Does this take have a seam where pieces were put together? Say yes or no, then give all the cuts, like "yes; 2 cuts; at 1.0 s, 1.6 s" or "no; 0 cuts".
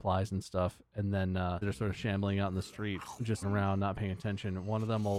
yes; 2 cuts; at 1.6 s, 3.4 s